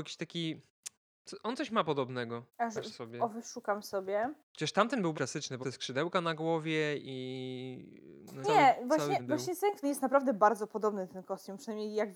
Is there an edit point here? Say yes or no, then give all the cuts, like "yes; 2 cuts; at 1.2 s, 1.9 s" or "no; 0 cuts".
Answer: yes; 8 cuts; at 2.5 s, 2.9 s, 4.4 s, 5.1 s, 5.6 s, 8.4 s, 9.2 s, 9.8 s